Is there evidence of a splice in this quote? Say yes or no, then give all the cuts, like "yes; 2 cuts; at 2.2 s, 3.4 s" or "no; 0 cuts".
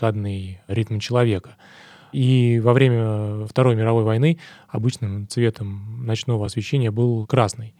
no; 0 cuts